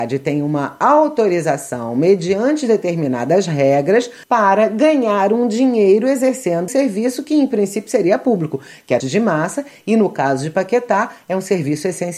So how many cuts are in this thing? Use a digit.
3